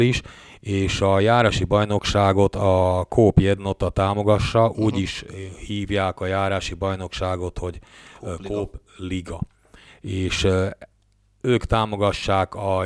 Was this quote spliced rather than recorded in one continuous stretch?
no; 0 cuts

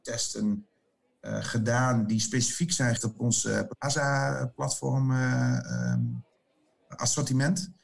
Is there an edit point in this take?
yes; 1 cut; at 3.0 s

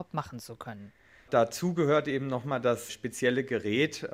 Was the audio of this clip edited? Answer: no; 0 cuts

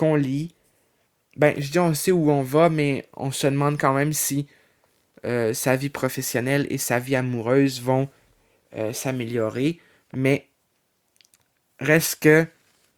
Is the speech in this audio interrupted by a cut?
no; 0 cuts

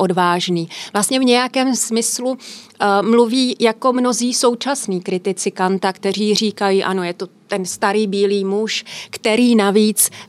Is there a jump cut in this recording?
no; 0 cuts

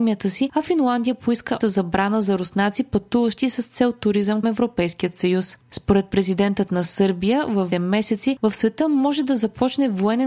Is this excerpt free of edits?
no; 3 cuts; at 1.6 s, 4.4 s, 7.7 s

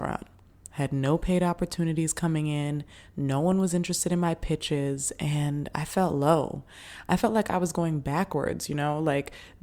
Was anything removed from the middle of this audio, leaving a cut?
no; 0 cuts

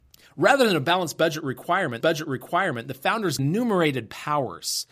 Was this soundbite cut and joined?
yes; 2 cuts; at 2.0 s, 3.4 s

